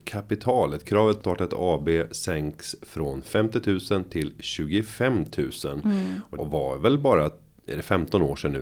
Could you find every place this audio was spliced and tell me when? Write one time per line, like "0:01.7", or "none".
0:01.2
0:06.4